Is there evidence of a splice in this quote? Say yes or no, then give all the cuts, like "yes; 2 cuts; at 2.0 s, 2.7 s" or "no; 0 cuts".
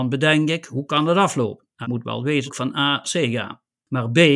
yes; 3 cuts; at 1.8 s, 2.5 s, 3.0 s